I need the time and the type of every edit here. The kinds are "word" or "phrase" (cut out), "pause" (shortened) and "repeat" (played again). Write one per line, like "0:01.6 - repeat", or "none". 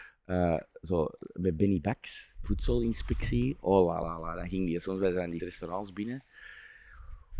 0:02.4 - word
0:04.0 - word
0:05.4 - word